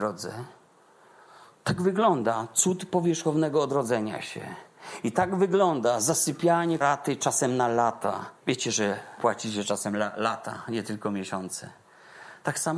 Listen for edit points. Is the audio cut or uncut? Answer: cut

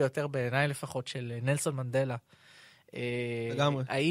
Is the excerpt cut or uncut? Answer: uncut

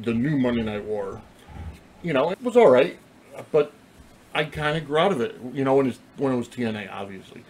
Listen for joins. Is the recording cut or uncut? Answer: cut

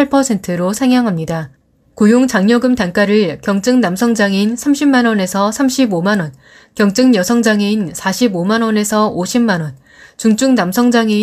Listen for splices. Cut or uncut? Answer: uncut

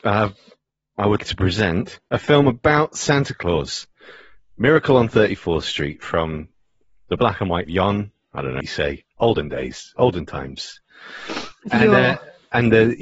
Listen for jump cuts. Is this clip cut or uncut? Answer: cut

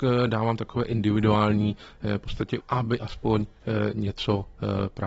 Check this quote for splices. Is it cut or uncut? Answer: cut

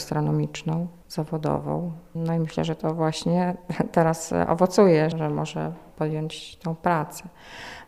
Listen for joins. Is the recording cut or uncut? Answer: cut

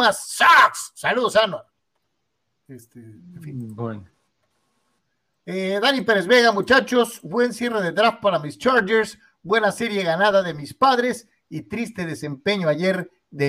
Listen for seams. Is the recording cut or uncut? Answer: uncut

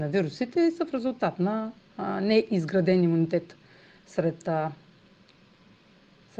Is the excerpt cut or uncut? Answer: uncut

